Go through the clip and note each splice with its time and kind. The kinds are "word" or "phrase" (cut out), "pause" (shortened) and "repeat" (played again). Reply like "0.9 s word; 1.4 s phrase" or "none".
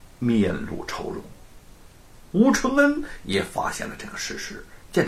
none